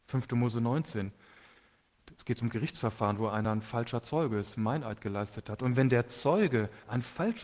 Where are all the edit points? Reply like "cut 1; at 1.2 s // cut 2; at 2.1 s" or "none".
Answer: none